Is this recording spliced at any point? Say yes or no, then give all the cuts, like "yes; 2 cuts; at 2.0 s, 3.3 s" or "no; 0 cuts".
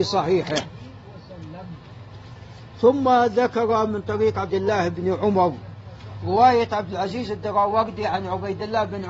yes; 1 cut; at 4.5 s